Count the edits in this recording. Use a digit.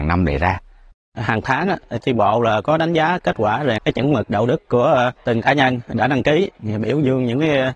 2